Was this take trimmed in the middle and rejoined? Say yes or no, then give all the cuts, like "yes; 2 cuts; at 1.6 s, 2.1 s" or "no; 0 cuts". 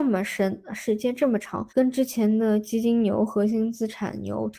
yes; 1 cut; at 1.7 s